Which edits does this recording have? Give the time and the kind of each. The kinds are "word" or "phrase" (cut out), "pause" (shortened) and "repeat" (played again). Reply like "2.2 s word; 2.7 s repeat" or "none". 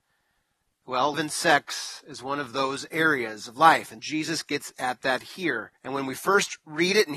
1.1 s word; 4.0 s word; 5.8 s pause